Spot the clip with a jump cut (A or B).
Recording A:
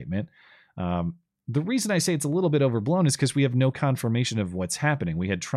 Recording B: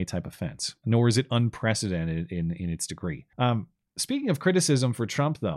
B